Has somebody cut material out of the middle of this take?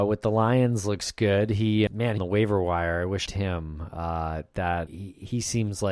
yes; 4 cuts; at 1.9 s, 2.2 s, 3.3 s, 4.9 s

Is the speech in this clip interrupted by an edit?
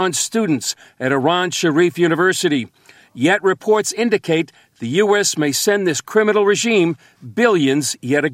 no; 0 cuts

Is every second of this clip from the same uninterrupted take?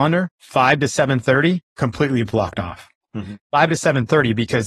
no; 1 cut; at 1.7 s

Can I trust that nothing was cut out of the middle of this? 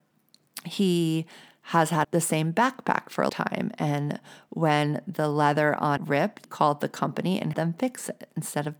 no; 5 cuts; at 2.0 s, 3.3 s, 6.0 s, 6.4 s, 7.5 s

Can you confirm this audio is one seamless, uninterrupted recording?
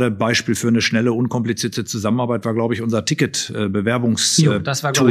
yes; 0 cuts

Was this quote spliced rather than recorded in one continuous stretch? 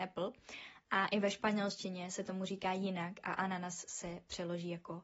no; 0 cuts

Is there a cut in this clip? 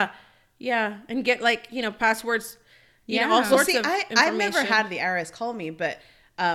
no; 0 cuts

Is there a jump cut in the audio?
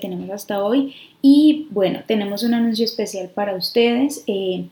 no; 0 cuts

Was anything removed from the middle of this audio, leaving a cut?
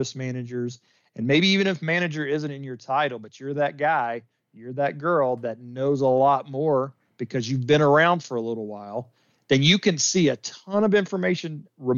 no; 0 cuts

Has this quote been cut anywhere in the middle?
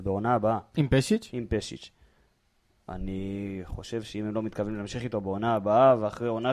no; 0 cuts

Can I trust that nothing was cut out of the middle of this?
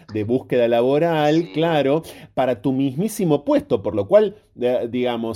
yes; 0 cuts

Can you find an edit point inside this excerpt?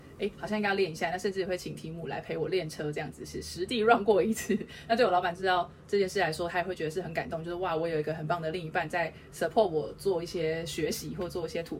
no; 0 cuts

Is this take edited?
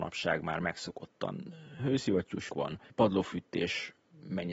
yes; 2 cuts; at 2.5 s, 2.9 s

